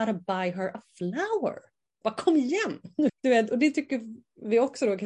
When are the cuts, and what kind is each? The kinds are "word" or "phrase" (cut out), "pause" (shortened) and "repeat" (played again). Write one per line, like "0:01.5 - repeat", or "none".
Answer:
0:03.1 - word